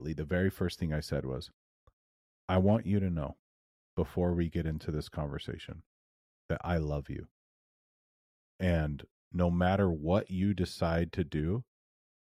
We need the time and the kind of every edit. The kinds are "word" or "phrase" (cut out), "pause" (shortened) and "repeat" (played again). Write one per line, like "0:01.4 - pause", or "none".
none